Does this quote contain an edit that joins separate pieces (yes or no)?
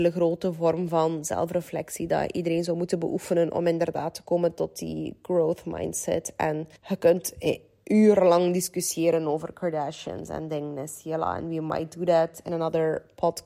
yes